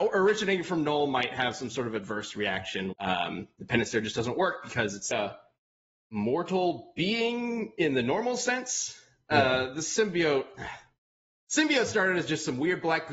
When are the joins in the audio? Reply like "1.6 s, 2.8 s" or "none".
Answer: 2.9 s, 5.1 s